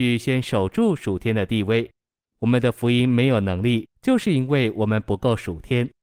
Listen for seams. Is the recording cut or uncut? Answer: cut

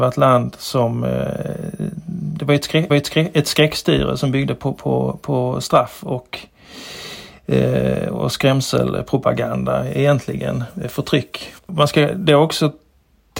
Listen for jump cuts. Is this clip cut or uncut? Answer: cut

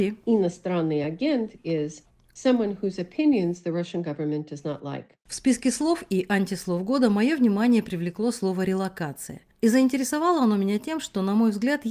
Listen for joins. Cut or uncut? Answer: uncut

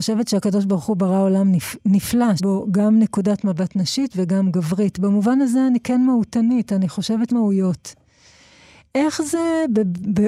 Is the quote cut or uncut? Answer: cut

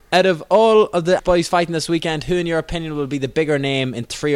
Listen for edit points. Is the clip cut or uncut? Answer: cut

